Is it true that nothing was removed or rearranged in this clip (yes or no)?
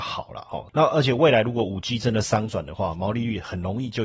yes